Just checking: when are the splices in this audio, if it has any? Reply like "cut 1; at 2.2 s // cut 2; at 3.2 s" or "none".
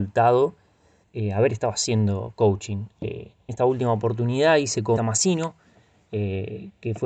cut 1; at 1.0 s // cut 2; at 3.5 s // cut 3; at 5.0 s